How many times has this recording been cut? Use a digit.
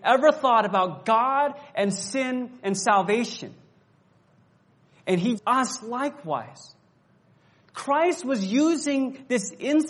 1